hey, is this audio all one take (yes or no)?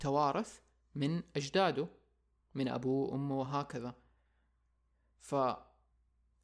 yes